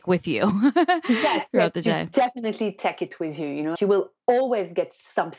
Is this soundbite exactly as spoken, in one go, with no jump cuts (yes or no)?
no